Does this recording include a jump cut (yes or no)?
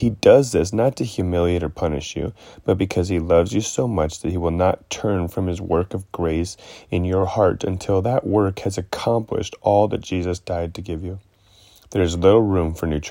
no